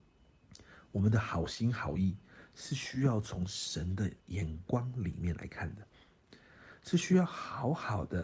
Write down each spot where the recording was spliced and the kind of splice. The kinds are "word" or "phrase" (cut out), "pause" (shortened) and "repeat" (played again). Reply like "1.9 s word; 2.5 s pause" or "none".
4.2 s pause